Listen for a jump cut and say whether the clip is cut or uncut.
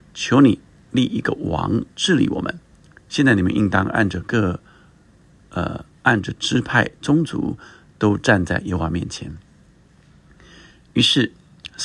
uncut